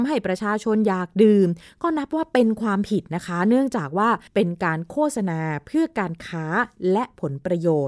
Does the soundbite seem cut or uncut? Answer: cut